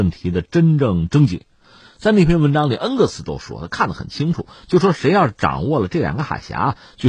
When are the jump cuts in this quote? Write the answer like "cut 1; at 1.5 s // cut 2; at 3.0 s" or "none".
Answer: none

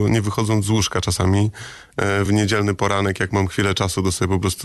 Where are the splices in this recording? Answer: none

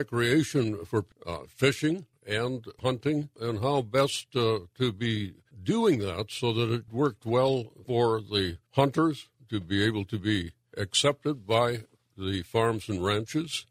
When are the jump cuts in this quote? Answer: none

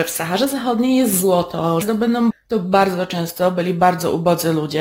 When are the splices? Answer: cut 1; at 1.8 s // cut 2; at 2.3 s

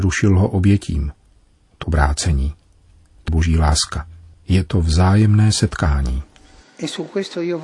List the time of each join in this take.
cut 1; at 1.8 s // cut 2; at 3.3 s

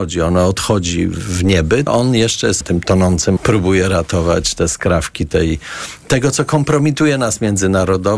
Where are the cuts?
cut 1; at 1.9 s // cut 2; at 2.6 s // cut 3; at 3.4 s

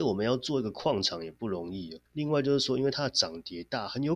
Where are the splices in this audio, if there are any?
cut 1; at 2.1 s

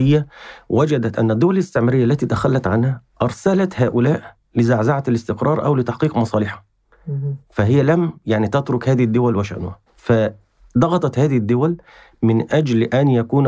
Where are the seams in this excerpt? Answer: cut 1; at 9.9 s

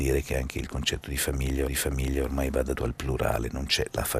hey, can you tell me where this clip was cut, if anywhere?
cut 1; at 1.7 s // cut 2; at 2.8 s

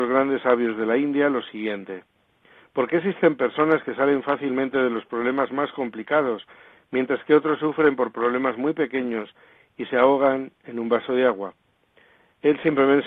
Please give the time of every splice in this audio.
none

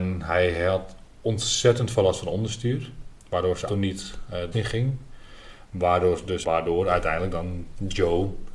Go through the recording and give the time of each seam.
cut 1; at 3.2 s // cut 2; at 3.7 s // cut 3; at 4.5 s // cut 4; at 6.4 s

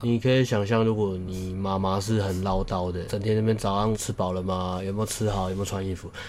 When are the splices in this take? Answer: cut 1; at 3.1 s // cut 2; at 3.9 s

